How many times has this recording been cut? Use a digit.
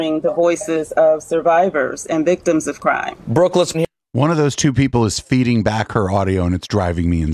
1